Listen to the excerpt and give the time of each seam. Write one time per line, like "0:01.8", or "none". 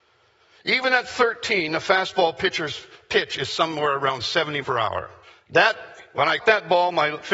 0:04.6
0:05.2
0:06.4